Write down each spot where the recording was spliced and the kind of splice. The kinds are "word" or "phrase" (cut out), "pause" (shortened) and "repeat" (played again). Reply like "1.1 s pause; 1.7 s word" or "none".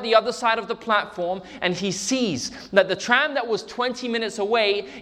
none